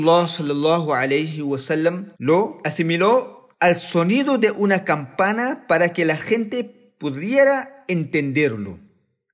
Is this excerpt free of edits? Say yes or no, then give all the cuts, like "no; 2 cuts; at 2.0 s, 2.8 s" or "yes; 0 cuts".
no; 2 cuts; at 2.1 s, 3.5 s